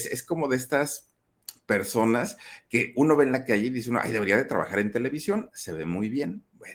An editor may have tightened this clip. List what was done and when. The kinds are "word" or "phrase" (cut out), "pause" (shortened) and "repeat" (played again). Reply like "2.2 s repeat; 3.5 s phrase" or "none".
none

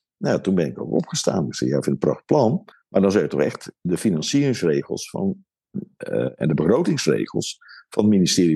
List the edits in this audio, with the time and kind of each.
2.7 s pause

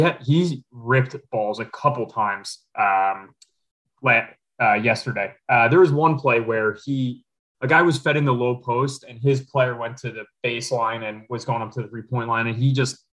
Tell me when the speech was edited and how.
none

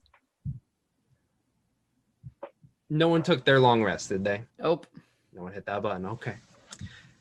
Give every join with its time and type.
4.5 s pause

